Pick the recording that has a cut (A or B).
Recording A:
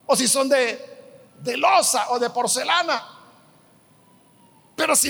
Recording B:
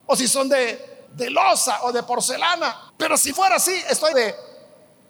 B